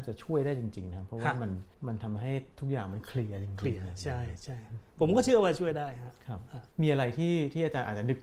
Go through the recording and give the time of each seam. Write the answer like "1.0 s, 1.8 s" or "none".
1.7 s, 6.7 s

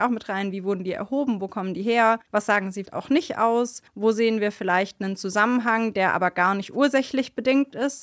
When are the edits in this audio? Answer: 2.3 s, 2.9 s, 3.9 s

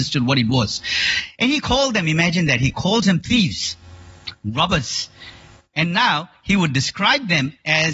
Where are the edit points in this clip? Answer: none

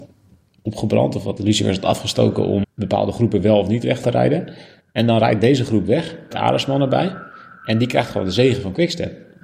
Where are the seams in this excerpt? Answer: 1.4 s, 2.6 s, 4.0 s, 6.3 s

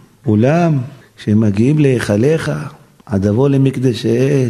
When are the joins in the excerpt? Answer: none

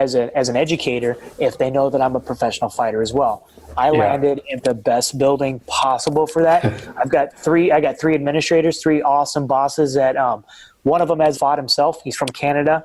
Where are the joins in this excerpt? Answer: 4.6 s, 11.3 s

